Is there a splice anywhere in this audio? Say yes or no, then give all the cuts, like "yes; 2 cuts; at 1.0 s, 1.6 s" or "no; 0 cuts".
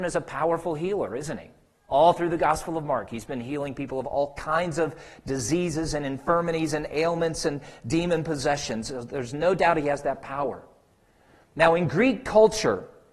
no; 0 cuts